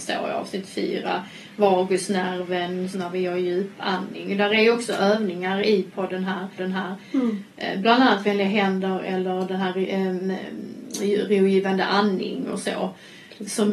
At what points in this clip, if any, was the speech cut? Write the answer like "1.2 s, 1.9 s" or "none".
2.9 s, 6.6 s